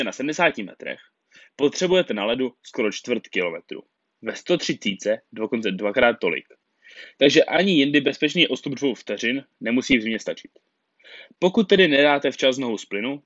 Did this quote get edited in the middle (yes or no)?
no